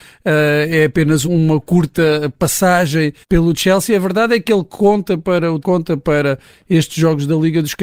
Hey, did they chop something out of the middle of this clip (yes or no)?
yes